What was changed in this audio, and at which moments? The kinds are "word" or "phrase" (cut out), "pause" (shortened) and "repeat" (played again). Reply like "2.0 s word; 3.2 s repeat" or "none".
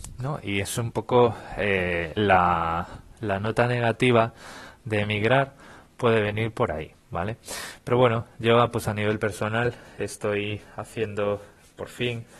none